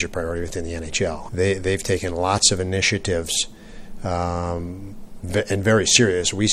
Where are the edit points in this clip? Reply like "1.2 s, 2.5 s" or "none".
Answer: 1.3 s